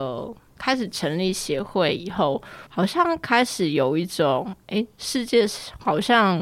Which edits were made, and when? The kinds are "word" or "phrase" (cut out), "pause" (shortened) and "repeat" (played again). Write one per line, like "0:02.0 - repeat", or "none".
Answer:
0:02.7 - pause